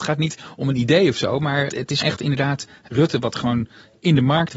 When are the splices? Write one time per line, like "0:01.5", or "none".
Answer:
0:01.7
0:02.0
0:02.9